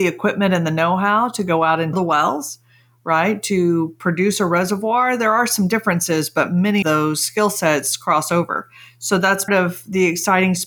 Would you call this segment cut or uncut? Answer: cut